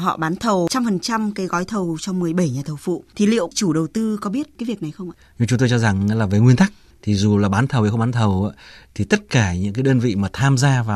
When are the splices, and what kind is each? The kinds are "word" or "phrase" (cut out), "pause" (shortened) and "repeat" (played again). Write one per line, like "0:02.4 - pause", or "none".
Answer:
none